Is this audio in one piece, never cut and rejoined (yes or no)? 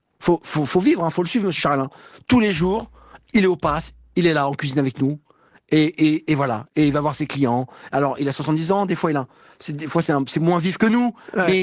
yes